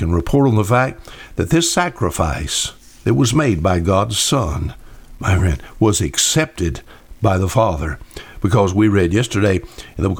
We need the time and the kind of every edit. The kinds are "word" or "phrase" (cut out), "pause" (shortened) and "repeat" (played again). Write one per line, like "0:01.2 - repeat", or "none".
none